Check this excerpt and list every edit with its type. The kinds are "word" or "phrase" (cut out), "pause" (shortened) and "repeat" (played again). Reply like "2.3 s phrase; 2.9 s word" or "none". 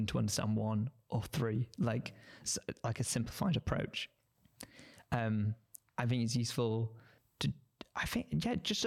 none